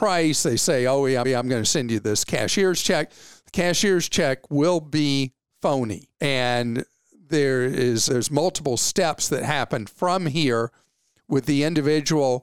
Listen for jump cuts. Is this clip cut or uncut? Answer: cut